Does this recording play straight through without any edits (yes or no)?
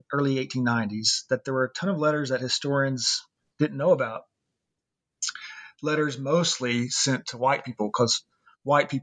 yes